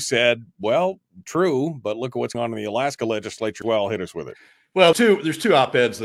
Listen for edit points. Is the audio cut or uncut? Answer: cut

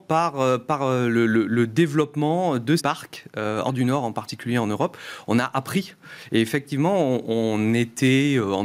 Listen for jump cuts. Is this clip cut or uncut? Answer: cut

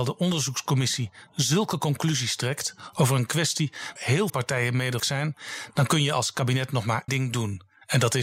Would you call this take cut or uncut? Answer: cut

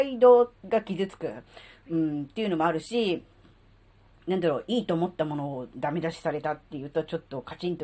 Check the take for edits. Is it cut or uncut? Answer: uncut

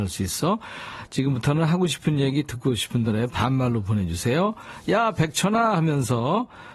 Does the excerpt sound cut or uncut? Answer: uncut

